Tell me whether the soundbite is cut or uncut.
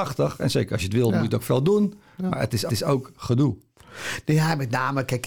cut